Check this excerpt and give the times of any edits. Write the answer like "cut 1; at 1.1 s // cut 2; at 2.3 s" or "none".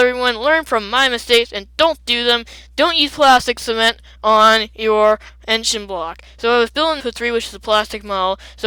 cut 1; at 7.0 s